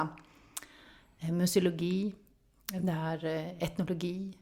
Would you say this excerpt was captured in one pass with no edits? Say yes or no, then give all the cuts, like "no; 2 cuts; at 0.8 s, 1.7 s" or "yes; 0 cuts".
yes; 0 cuts